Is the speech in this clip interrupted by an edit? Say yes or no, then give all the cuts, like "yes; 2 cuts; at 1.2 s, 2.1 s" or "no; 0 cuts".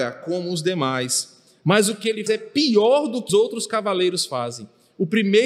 yes; 2 cuts; at 2.3 s, 3.3 s